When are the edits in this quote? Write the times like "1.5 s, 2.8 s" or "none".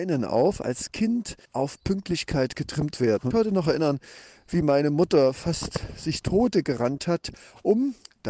1.4 s, 3.3 s, 6.2 s